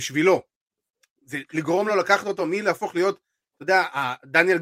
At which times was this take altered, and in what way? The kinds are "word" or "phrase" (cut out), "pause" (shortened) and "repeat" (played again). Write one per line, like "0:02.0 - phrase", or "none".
none